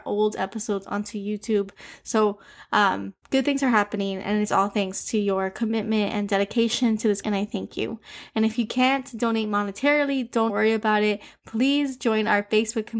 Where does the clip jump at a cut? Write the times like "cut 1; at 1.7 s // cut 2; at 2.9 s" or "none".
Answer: cut 1; at 3.2 s // cut 2; at 7.2 s // cut 3; at 10.5 s

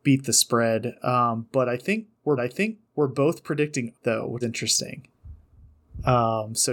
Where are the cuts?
cut 1; at 2.4 s // cut 2; at 3.9 s // cut 3; at 4.4 s

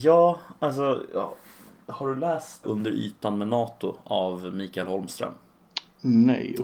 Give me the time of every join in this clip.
cut 1; at 2.6 s

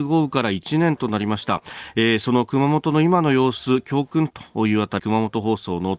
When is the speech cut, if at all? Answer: cut 1; at 5.0 s

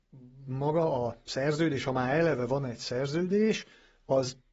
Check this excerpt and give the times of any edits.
none

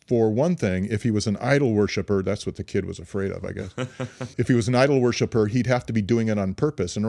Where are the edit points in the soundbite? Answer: cut 1; at 4.3 s

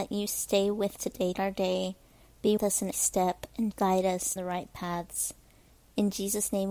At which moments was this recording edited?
cut 1; at 1.0 s // cut 2; at 1.3 s // cut 3; at 2.6 s // cut 4; at 2.9 s // cut 5; at 3.7 s // cut 6; at 4.4 s

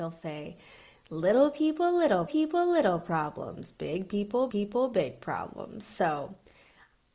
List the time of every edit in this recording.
cut 1; at 2.3 s // cut 2; at 4.5 s

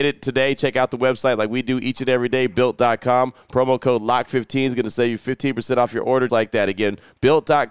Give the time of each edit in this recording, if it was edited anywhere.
cut 1; at 6.3 s

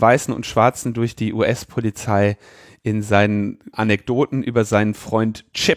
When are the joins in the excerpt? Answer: cut 1; at 3.7 s

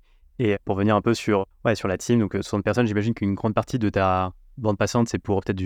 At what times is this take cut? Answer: none

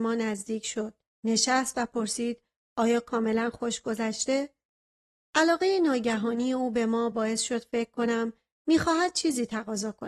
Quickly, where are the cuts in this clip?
none

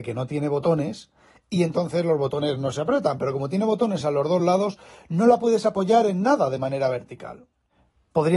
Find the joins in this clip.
none

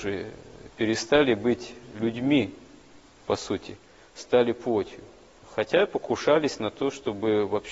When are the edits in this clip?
none

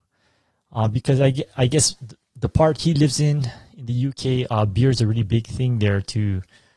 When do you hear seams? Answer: none

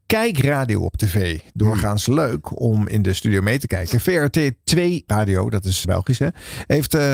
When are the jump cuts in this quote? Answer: cut 1; at 5.1 s // cut 2; at 5.8 s

